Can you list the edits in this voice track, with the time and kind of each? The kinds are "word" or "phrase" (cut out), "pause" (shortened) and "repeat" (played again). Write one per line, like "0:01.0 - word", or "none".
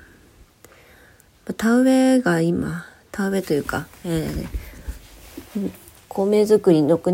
0:06.0 - pause